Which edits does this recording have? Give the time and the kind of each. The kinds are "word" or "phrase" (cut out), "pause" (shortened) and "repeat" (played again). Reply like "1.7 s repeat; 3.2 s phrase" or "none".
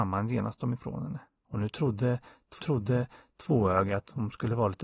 1.3 s pause; 2.6 s repeat